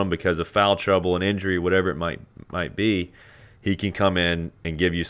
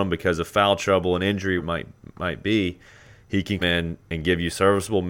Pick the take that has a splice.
second; 2 cuts; at 1.6 s, 3.6 s

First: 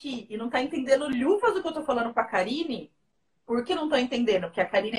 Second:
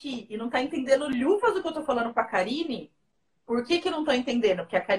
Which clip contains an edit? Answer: first; 1 cut; at 3.7 s

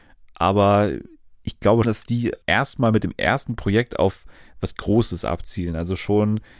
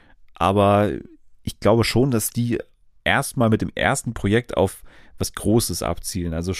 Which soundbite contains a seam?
first; 2 cuts; at 1.8 s, 2.4 s

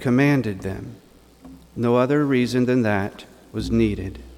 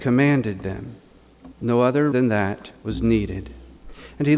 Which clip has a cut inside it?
second; 3 cuts; at 1.5 s, 2.1 s, 2.8 s

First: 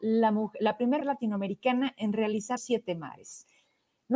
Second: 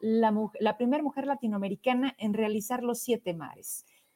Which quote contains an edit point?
first; 2 cuts; at 1.0 s, 2.6 s

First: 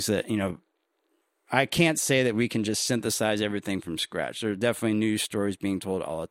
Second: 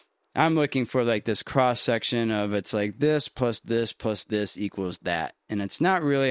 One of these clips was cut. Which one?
first; 1 cut; at 1.2 s

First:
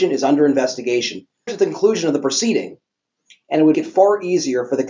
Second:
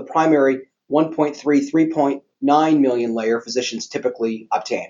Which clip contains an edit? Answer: first; 2 cuts; at 1.5 s, 3.7 s

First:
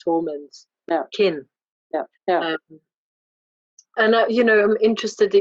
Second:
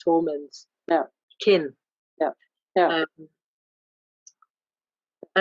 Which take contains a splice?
first; 3 cuts; at 1.1 s, 2.1 s, 4.0 s

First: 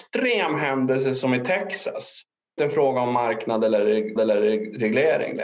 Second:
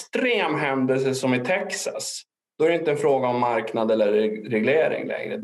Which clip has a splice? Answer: first; 2 cuts; at 2.6 s, 4.2 s

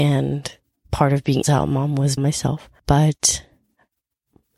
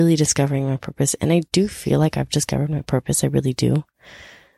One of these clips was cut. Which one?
first; 3 cuts; at 1.4 s, 2.2 s, 2.8 s

